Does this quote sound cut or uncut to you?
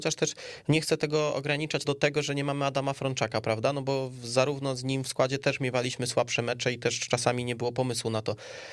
cut